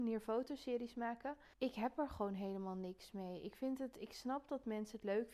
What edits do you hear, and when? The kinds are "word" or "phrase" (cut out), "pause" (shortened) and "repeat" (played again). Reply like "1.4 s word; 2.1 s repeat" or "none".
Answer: 1.5 s pause